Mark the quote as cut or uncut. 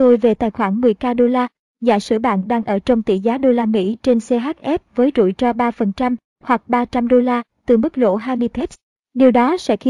uncut